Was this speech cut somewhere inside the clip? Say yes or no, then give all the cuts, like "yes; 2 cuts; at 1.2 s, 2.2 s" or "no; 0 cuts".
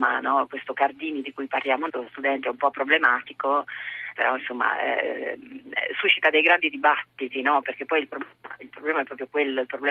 yes; 2 cuts; at 1.9 s, 4.1 s